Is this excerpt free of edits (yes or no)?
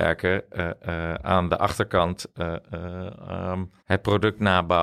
no